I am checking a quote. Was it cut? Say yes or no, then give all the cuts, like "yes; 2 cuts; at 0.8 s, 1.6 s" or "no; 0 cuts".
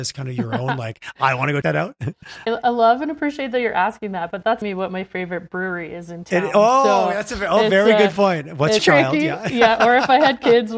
yes; 4 cuts; at 1.6 s, 2.5 s, 4.6 s, 8.8 s